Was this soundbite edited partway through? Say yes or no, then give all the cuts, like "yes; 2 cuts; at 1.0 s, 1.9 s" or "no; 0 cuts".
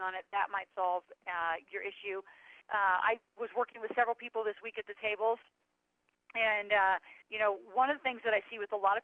yes; 2 cuts; at 2.6 s, 7.2 s